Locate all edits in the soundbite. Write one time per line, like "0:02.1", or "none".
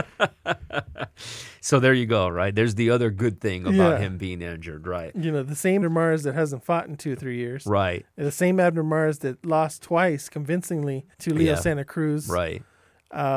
0:05.8
0:11.1